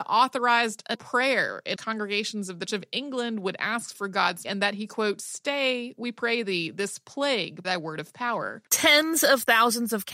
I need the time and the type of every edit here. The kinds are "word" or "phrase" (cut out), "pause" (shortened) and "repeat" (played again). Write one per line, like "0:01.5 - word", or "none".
0:00.9 - word
0:01.8 - word
0:02.7 - word
0:04.4 - word
0:07.6 - word
0:08.7 - pause